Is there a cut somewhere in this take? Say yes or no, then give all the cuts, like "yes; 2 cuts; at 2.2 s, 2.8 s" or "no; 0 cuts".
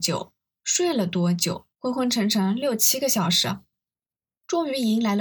yes; 1 cut; at 1.7 s